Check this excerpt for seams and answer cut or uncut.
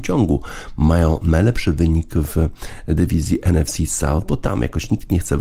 uncut